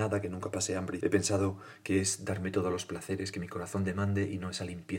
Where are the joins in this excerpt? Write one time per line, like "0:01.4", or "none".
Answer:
0:01.0